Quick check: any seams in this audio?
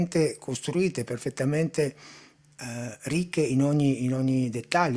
no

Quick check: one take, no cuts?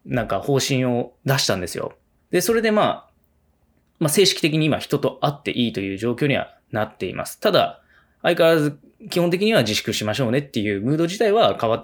no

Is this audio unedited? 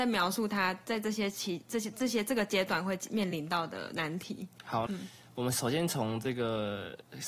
no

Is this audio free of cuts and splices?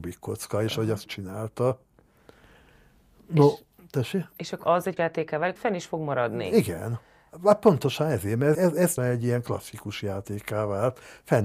no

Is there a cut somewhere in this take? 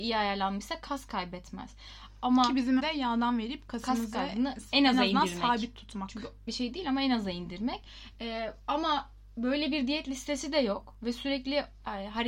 yes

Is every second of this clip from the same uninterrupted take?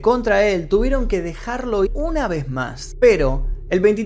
no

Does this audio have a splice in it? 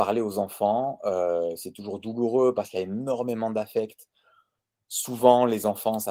no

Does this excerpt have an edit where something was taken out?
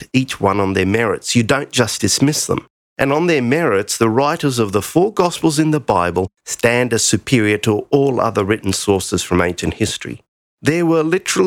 no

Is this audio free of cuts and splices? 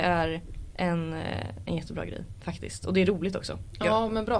yes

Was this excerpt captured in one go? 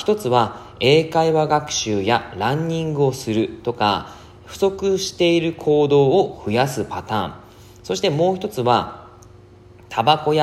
yes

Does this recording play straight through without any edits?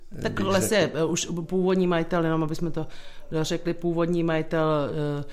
yes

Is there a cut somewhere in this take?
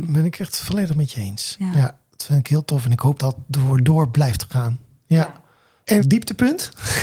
yes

